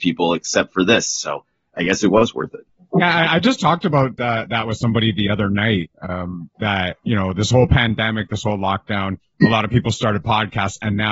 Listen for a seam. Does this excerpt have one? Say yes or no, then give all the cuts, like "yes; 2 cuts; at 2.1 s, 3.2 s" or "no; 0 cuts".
no; 0 cuts